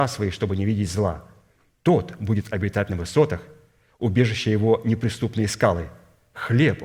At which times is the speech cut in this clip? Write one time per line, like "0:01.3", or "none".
none